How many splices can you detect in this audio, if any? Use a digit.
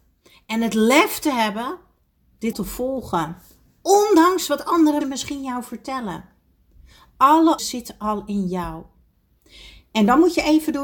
3